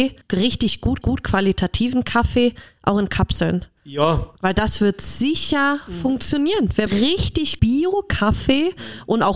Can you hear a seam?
yes; 3 cuts; at 1.0 s, 6.9 s, 7.6 s

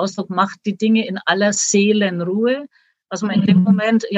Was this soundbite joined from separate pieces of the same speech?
no; 0 cuts

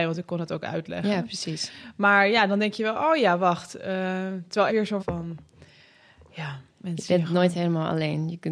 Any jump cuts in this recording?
yes; 3 cuts; at 4.7 s, 5.0 s, 6.7 s

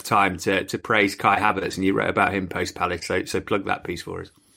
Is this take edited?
no; 0 cuts

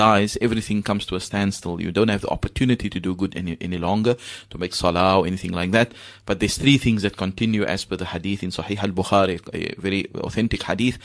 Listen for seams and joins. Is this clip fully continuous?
yes; 0 cuts

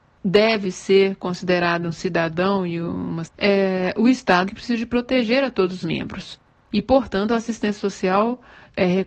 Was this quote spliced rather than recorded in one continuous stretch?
yes; 3 cuts; at 3.2 s, 4.5 s, 5.8 s

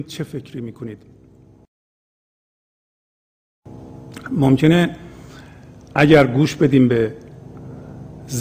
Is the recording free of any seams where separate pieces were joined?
yes; 0 cuts

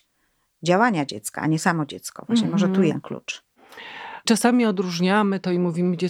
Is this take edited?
yes; 1 cut; at 2.9 s

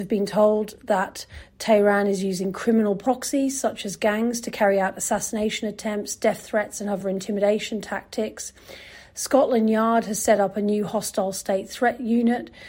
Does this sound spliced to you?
no; 0 cuts

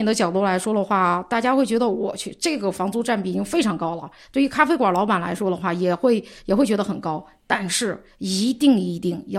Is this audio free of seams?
yes; 0 cuts

